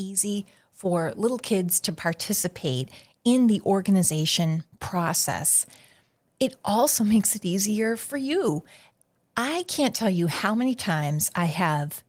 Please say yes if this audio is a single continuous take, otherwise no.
yes